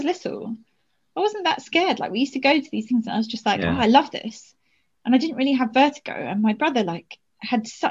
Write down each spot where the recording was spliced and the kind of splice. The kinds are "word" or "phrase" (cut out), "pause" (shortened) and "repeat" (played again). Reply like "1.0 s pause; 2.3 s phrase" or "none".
none